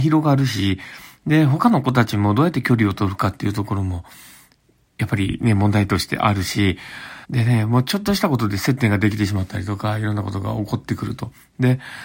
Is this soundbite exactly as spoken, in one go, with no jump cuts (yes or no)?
no